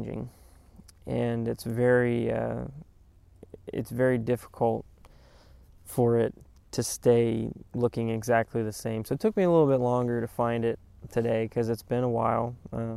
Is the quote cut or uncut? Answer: uncut